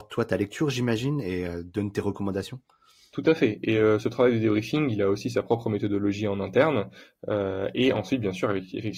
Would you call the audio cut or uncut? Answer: uncut